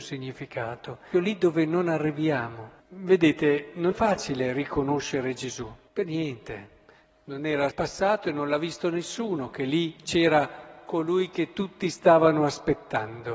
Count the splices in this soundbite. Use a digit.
6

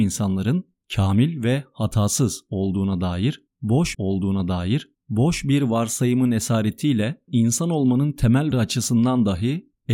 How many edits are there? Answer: 3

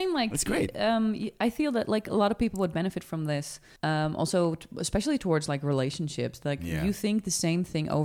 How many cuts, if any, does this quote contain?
1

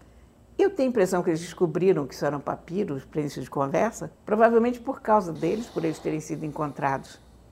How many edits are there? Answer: 2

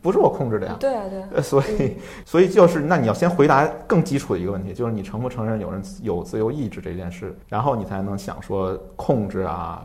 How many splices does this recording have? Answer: 1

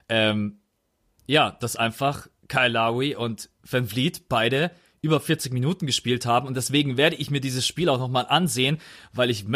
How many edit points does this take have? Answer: 0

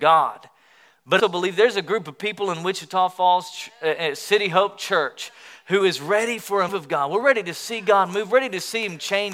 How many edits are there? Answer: 2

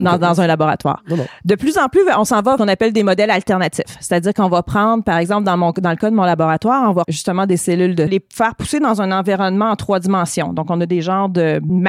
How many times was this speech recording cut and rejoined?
3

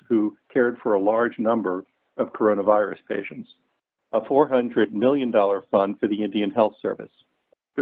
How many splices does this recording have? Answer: 0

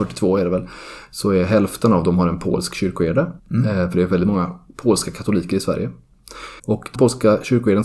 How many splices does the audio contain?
3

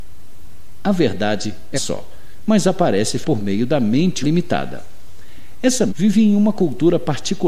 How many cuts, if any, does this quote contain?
4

